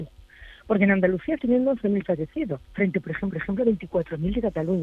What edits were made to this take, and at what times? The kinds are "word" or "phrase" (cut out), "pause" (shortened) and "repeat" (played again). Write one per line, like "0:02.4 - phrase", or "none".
0:01.4 - word
0:02.6 - pause
0:03.3 - repeat